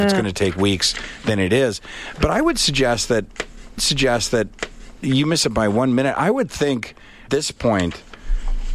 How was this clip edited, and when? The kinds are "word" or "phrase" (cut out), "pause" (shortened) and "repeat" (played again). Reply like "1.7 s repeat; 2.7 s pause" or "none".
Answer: 3.8 s repeat; 7.3 s word